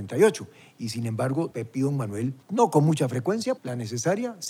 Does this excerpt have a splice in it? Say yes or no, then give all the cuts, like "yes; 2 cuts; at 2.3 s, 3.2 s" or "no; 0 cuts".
yes; 3 cuts; at 1.5 s, 2.4 s, 3.6 s